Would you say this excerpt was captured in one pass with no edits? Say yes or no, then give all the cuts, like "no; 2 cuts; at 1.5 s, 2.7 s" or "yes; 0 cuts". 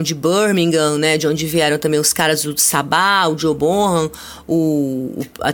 yes; 0 cuts